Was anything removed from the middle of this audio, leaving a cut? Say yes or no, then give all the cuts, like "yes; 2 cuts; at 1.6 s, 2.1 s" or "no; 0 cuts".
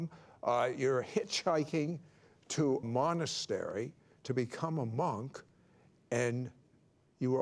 yes; 1 cut; at 2.8 s